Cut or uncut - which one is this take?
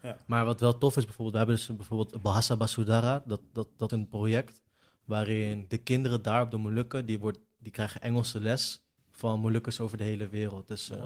cut